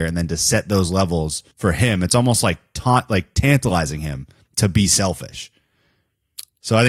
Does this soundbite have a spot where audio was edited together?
yes; 1 cut; at 1.5 s

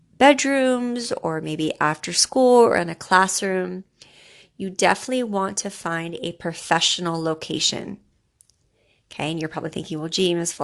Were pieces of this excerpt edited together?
no; 0 cuts

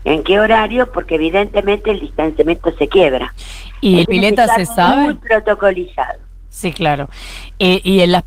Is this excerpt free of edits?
no; 1 cut; at 4.0 s

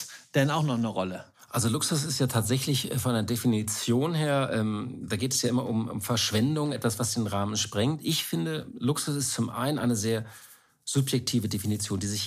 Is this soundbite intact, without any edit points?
yes; 0 cuts

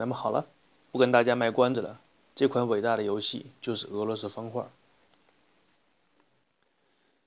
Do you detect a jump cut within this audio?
no; 0 cuts

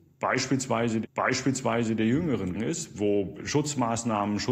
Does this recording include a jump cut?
yes; 3 cuts; at 1.0 s, 2.5 s, 3.4 s

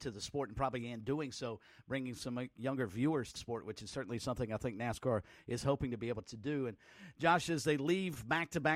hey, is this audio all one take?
no; 1 cut; at 3.3 s

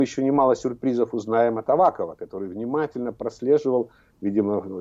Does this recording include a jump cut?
no; 0 cuts

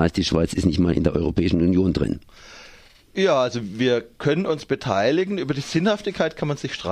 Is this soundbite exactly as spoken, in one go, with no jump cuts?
yes; 0 cuts

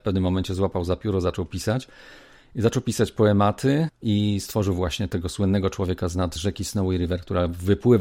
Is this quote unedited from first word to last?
yes; 0 cuts

